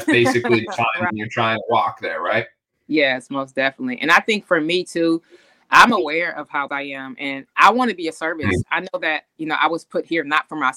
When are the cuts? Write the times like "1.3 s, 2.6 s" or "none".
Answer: 1.1 s, 6.7 s